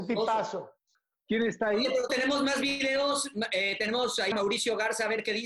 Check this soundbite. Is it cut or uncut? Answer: cut